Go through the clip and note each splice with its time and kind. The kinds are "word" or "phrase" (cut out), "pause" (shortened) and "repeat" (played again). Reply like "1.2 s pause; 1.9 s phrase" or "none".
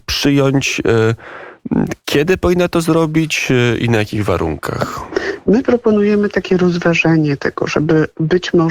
none